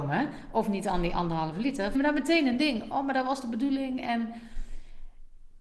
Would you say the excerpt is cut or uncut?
cut